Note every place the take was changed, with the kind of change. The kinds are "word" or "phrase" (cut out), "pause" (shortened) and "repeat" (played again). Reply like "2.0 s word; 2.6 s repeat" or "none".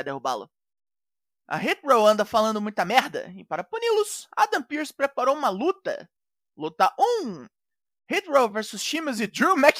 none